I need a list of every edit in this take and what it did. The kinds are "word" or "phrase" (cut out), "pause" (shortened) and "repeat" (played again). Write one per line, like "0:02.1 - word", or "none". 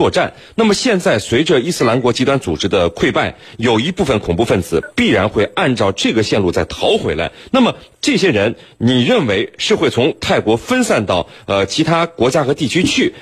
none